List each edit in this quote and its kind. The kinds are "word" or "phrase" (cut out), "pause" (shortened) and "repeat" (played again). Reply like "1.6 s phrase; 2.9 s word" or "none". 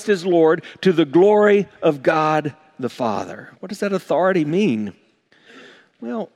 3.6 s pause